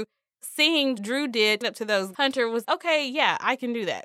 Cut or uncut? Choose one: cut